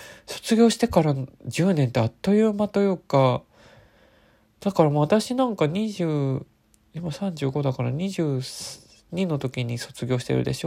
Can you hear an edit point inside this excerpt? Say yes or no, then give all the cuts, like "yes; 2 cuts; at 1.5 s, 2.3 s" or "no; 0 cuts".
no; 0 cuts